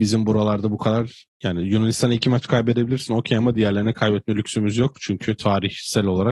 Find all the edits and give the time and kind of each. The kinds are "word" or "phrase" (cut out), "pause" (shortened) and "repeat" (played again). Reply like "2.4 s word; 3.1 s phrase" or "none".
1.3 s pause